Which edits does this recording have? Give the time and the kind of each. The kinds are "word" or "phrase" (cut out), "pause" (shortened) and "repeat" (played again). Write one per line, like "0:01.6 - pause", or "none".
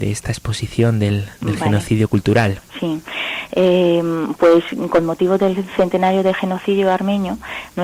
0:02.7 - pause